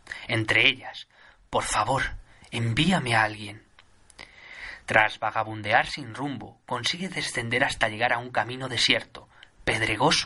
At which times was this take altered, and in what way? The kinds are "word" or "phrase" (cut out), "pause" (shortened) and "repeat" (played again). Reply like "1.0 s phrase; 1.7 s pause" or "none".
none